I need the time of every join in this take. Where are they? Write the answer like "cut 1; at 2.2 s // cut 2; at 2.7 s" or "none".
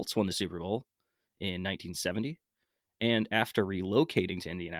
none